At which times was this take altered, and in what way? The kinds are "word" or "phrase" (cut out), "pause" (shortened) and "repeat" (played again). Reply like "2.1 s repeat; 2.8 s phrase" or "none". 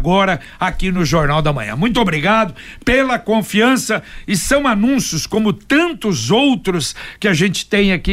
none